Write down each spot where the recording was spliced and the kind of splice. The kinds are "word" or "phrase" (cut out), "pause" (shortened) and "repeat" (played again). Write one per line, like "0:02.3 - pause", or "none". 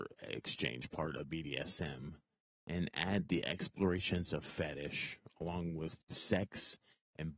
0:06.0 - pause